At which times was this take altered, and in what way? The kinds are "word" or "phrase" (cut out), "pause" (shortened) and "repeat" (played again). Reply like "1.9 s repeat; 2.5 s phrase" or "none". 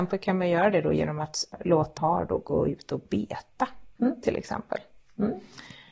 2.0 s phrase; 4.0 s pause